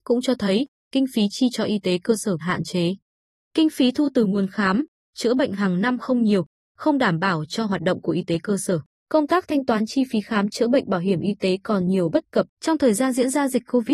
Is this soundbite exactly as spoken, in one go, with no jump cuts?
no; 3 cuts; at 2.4 s, 8.9 s, 12.5 s

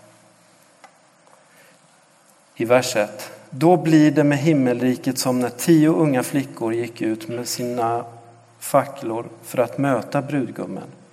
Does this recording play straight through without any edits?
yes; 0 cuts

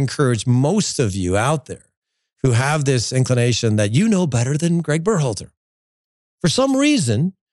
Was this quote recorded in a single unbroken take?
yes; 0 cuts

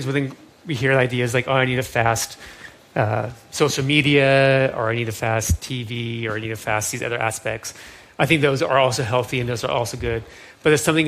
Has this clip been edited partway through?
no; 0 cuts

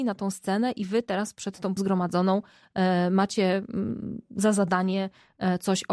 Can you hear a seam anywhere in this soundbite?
yes; 1 cut; at 1.8 s

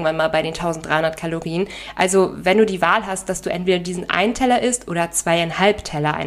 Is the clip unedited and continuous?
yes; 0 cuts

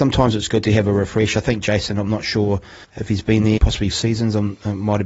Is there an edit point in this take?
yes; 3 cuts; at 2.8 s, 3.6 s, 3.9 s

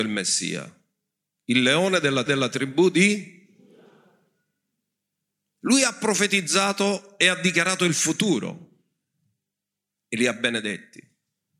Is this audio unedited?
no; 1 cut; at 2.3 s

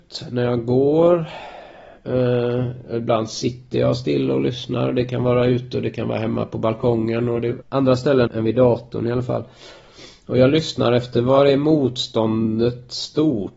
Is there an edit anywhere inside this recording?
yes; 2 cuts; at 7.6 s, 8.3 s

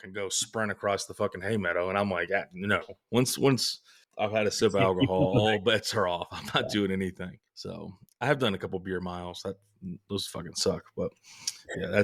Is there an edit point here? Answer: yes; 2 cuts; at 4.0 s, 7.5 s

